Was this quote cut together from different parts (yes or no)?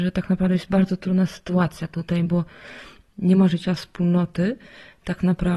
no